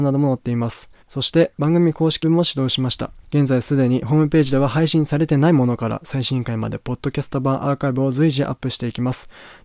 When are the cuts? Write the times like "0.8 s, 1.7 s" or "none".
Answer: 1.0 s, 2.2 s, 3.2 s